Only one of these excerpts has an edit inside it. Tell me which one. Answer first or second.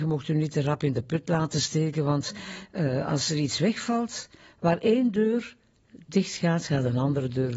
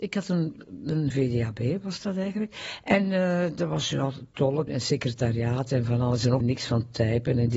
second